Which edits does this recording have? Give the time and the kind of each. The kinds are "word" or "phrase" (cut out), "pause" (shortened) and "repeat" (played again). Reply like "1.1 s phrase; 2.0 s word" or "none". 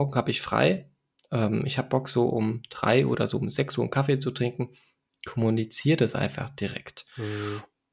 none